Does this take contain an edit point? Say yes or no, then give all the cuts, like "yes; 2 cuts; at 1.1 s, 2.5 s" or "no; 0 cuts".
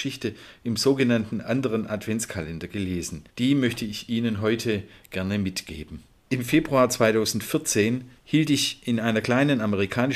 yes; 2 cuts; at 3.3 s, 8.2 s